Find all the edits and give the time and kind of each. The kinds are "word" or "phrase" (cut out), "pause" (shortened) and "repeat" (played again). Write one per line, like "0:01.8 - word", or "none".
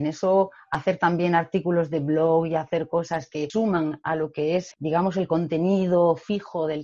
0:04.7 - word